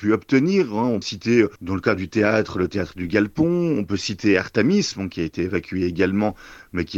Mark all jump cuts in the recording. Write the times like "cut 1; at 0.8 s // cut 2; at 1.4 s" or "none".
cut 1; at 1.0 s // cut 2; at 1.6 s